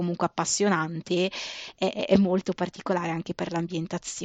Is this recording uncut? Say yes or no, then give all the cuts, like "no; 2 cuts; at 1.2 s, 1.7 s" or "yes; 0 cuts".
yes; 0 cuts